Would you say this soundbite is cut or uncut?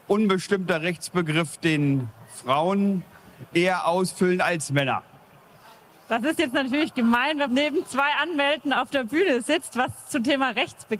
cut